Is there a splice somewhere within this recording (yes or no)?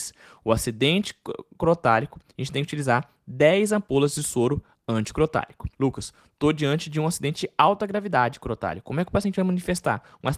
yes